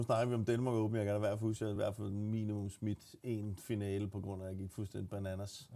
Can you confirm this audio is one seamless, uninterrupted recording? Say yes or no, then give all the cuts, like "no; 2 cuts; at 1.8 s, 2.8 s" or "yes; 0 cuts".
yes; 0 cuts